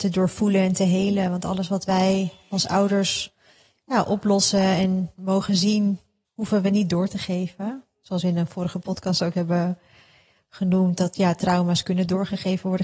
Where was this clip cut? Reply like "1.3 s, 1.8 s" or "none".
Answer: 6.2 s